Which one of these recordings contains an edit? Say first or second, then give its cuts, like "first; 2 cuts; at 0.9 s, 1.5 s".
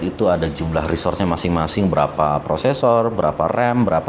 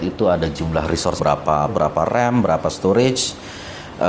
second; 2 cuts; at 1.2 s, 1.7 s